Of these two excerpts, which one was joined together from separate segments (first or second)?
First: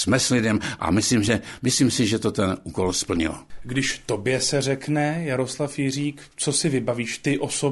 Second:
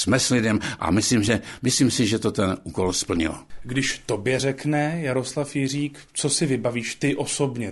second